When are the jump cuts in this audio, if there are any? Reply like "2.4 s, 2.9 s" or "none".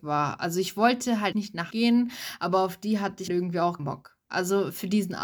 1.3 s, 1.7 s, 3.3 s, 3.8 s